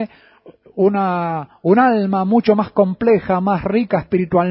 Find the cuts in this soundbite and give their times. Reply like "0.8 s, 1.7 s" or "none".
none